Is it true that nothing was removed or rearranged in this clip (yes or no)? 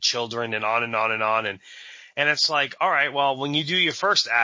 yes